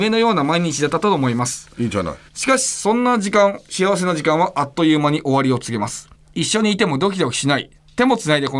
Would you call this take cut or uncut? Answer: cut